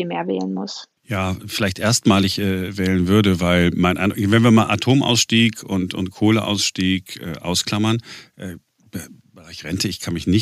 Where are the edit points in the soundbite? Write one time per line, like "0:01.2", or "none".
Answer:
0:01.0